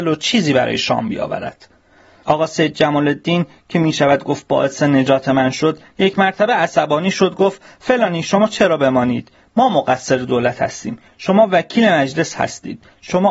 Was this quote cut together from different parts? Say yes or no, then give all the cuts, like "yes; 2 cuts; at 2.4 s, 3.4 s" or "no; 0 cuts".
no; 0 cuts